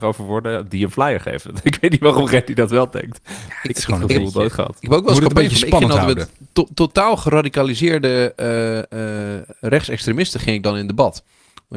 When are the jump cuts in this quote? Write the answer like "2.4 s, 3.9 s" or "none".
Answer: 6.5 s